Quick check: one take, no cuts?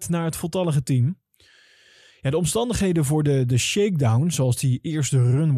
yes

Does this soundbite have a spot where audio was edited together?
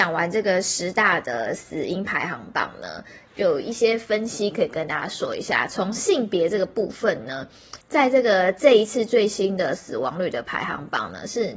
yes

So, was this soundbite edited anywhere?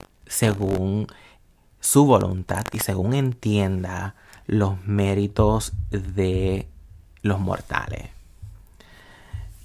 no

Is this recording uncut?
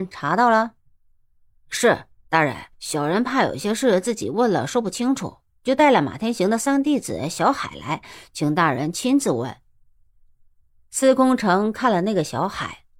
no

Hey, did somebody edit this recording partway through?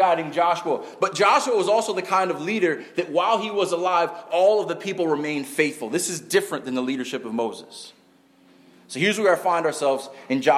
no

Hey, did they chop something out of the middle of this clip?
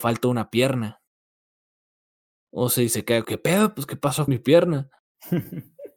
yes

